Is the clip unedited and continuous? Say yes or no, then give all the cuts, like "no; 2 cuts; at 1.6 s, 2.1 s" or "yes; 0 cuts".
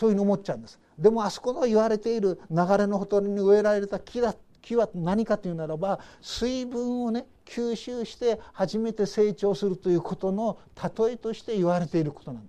yes; 0 cuts